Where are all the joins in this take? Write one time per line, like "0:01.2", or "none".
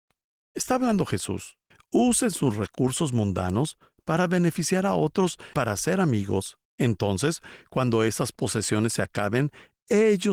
0:01.7
0:05.5
0:06.6